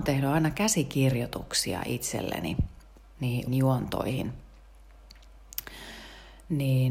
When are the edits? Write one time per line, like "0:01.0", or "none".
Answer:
0:03.5